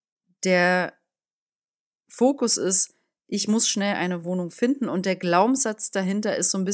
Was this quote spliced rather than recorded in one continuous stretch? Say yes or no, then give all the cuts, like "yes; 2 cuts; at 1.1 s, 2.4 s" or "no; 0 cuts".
no; 0 cuts